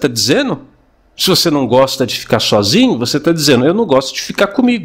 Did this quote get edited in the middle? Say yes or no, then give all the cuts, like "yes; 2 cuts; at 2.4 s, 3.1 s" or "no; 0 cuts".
no; 0 cuts